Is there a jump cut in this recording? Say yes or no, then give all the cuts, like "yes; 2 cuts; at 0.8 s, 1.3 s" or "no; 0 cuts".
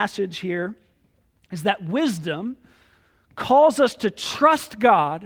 no; 0 cuts